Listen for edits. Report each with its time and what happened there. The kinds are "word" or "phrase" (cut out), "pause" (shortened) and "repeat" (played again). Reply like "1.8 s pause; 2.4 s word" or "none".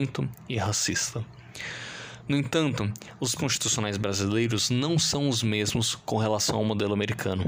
3.4 s word